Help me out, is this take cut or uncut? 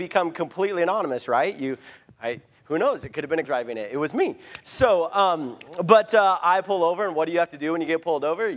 cut